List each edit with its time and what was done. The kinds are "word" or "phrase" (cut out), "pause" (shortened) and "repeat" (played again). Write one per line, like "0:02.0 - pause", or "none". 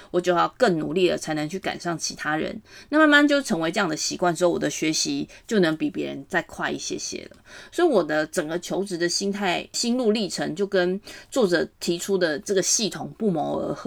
0:09.7 - word
0:11.7 - pause